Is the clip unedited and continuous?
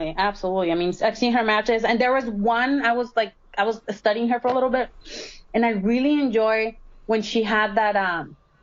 yes; 0 cuts

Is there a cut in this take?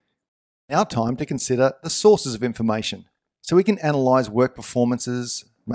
no; 0 cuts

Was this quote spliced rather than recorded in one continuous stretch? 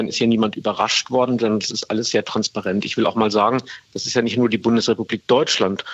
no; 0 cuts

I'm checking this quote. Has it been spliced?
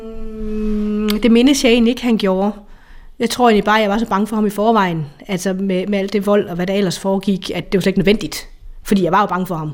yes; 1 cut; at 7.6 s

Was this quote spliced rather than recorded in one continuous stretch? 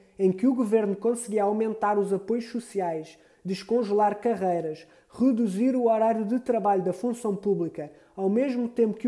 no; 0 cuts

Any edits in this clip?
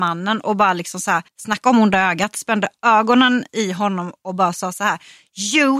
yes; 1 cut; at 1.3 s

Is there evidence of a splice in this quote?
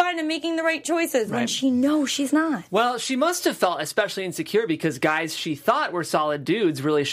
no; 0 cuts

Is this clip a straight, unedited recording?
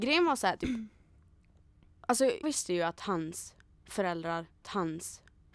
no; 2 cuts; at 2.4 s, 4.6 s

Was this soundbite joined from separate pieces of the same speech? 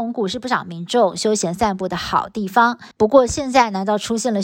yes; 1 cut; at 2.9 s

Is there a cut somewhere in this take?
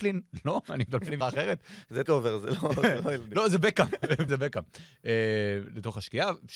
yes; 3 cuts; at 1.2 s, 2.1 s, 4.3 s

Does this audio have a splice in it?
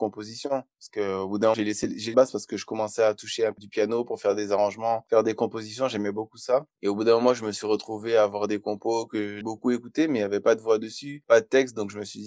yes; 4 cuts; at 1.5 s, 2.1 s, 3.6 s, 9.4 s

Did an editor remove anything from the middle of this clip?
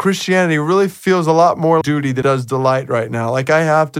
yes; 2 cuts; at 1.8 s, 2.2 s

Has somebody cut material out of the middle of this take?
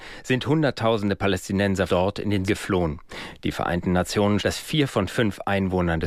yes; 3 cuts; at 1.9 s, 2.5 s, 4.4 s

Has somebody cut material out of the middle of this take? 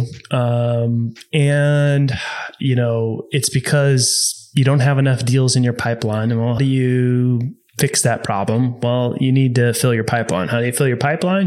yes; 1 cut; at 6.6 s

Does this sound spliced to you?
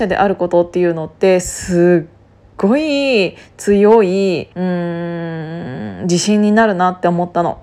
yes; 1 cut; at 4.5 s

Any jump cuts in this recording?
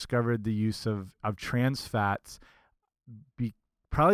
no; 0 cuts

